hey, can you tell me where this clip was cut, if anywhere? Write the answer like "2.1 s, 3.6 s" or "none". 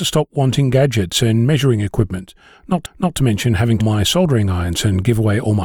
2.8 s, 3.8 s